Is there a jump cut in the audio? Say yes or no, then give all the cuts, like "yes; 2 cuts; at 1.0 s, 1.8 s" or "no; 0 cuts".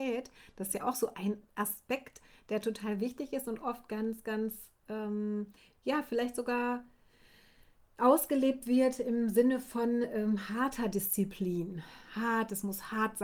no; 0 cuts